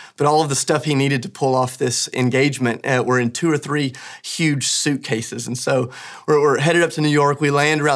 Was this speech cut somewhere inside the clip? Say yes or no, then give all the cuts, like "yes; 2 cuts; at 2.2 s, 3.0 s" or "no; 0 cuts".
no; 0 cuts